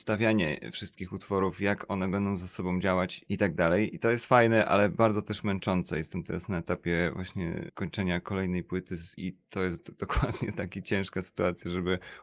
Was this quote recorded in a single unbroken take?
yes; 0 cuts

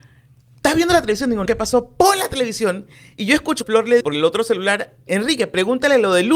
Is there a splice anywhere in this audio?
yes; 4 cuts; at 1.5 s, 3.6 s, 4.0 s, 5.1 s

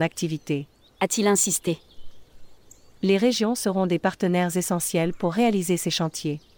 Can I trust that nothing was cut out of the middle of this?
yes; 0 cuts

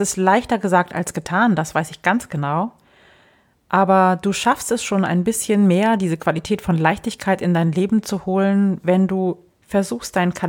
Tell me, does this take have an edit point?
no; 0 cuts

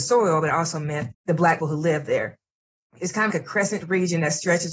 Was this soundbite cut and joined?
yes; 4 cuts; at 1.1 s, 1.6 s, 3.3 s, 3.8 s

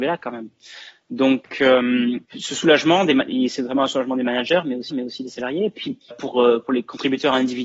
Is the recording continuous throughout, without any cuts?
no; 3 cuts; at 2.2 s, 4.9 s, 6.1 s

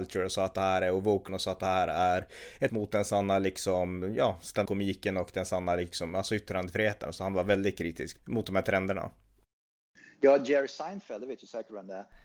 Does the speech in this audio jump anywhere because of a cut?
yes; 4 cuts; at 1.3 s, 2.7 s, 4.7 s, 8.2 s

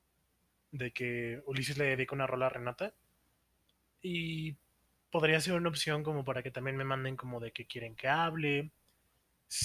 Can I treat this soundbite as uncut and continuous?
yes; 0 cuts

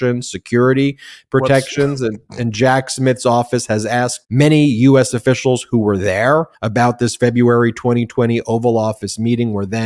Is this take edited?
yes; 2 cuts; at 4.2 s, 6.5 s

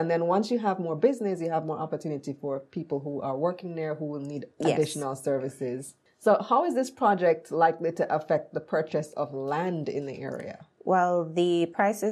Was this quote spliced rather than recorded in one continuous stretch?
no; 0 cuts

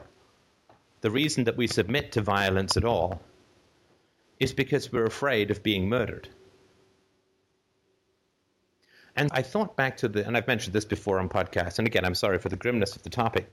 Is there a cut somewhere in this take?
yes; 1 cut; at 9.3 s

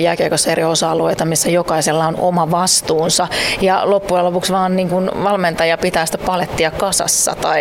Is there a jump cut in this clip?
no; 0 cuts

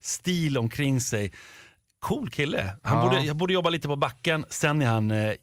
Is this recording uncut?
yes; 0 cuts

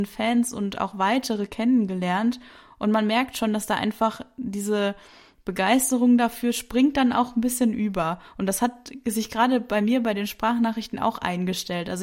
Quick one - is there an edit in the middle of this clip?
no; 0 cuts

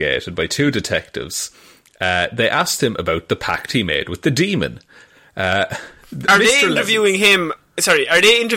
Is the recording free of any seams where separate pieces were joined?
yes; 0 cuts

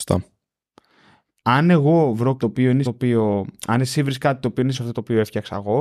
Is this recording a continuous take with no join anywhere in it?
no; 3 cuts; at 2.4 s, 2.8 s, 4.7 s

